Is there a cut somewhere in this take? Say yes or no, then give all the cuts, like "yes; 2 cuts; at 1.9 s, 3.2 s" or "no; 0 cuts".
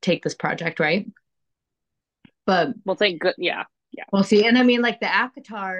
no; 0 cuts